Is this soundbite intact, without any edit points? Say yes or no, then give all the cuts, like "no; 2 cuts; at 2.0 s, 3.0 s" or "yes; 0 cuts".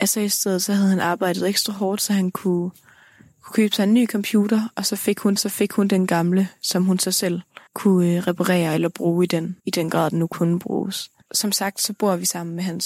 no; 4 cuts; at 5.4 s, 7.7 s, 9.6 s, 11.2 s